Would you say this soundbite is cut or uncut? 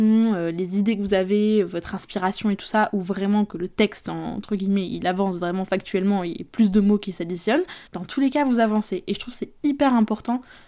cut